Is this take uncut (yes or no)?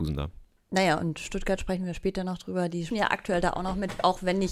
no